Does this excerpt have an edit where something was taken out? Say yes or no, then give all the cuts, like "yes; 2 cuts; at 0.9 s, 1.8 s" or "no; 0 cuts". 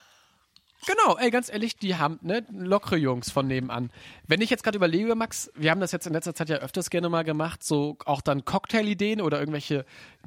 no; 0 cuts